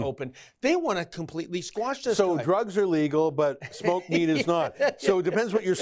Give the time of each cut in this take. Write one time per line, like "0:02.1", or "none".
none